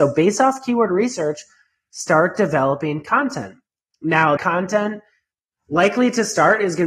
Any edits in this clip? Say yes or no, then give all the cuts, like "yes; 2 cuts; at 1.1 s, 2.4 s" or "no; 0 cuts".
yes; 1 cut; at 4.4 s